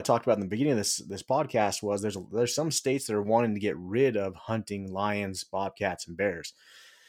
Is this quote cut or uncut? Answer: uncut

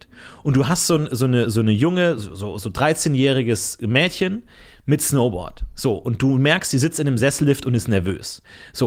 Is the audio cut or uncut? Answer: uncut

